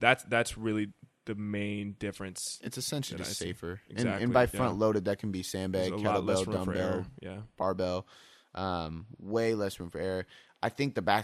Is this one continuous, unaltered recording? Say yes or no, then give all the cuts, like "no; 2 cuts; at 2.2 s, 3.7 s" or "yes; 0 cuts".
yes; 0 cuts